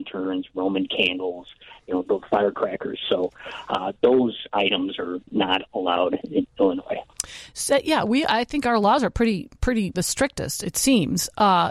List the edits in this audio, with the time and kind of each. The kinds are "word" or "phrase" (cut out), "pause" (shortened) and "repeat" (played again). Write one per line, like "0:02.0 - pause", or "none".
0:09.9 - word